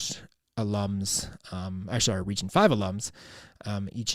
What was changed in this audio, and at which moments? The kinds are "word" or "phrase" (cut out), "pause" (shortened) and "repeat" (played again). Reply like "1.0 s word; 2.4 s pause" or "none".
none

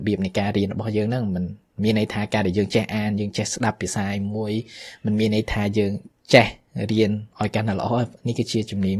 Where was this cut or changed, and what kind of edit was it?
7.3 s pause

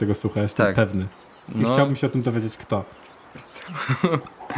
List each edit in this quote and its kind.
none

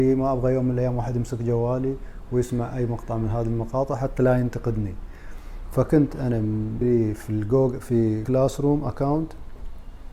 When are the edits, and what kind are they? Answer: 6.8 s word; 8.2 s word

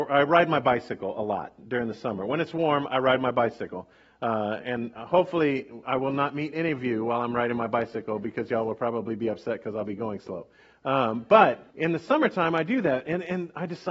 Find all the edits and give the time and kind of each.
4.6 s word; 11.7 s pause

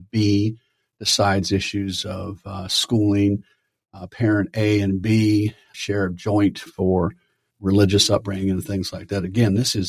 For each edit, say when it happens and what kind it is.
5.7 s word; 6.7 s word; 7.5 s word

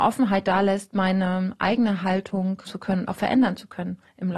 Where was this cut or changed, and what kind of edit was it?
2.7 s word

